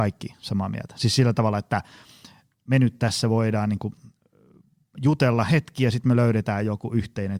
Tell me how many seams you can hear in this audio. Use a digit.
0